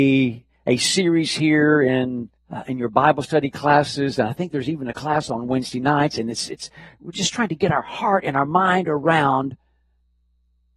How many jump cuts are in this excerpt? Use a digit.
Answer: 1